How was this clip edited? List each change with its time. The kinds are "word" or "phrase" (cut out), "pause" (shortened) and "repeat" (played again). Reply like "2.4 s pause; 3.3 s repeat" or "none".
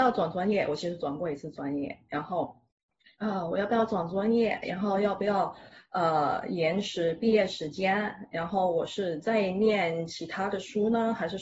none